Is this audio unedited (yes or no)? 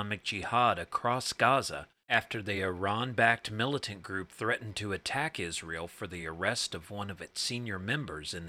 yes